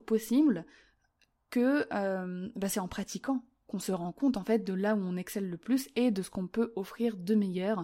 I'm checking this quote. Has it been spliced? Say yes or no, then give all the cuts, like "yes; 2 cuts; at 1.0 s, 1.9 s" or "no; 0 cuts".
no; 0 cuts